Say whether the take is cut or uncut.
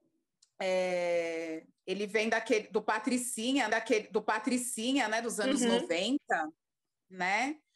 cut